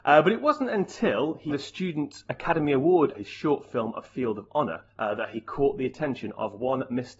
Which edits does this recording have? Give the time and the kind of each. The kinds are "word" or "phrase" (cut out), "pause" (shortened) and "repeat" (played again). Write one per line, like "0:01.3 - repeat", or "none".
0:01.5 - word
0:03.1 - phrase
0:04.9 - pause